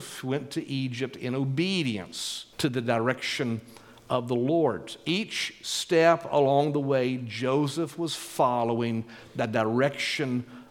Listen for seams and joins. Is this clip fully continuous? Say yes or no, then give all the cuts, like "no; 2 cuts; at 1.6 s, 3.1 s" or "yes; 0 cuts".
no; 1 cut; at 2.5 s